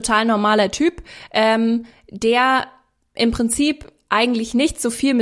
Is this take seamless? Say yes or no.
yes